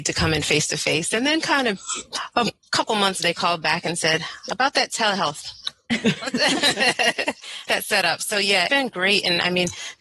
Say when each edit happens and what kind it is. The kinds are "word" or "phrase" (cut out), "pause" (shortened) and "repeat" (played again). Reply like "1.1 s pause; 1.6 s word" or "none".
3.2 s word; 7.7 s phrase; 8.7 s word